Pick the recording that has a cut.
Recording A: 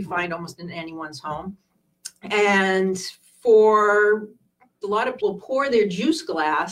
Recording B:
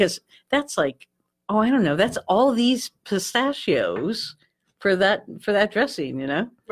A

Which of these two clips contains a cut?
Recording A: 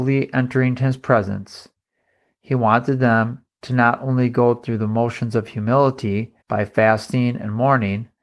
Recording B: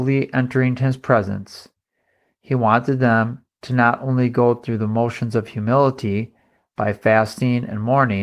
A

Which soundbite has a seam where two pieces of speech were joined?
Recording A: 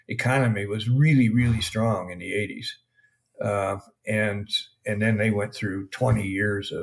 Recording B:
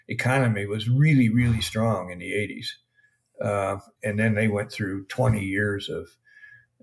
B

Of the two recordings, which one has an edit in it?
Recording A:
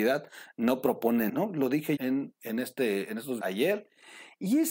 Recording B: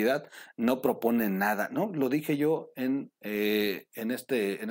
A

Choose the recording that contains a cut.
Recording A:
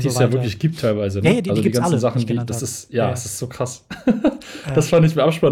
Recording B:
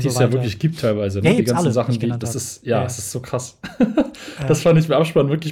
B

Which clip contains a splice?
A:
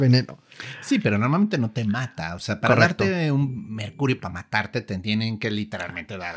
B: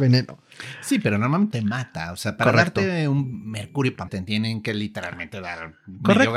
B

